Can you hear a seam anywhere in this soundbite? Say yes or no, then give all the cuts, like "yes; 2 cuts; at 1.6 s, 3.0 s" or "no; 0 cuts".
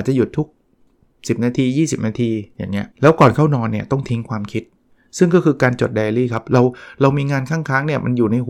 yes; 1 cut; at 2.9 s